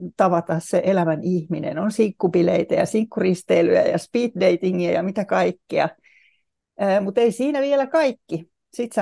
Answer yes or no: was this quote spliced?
no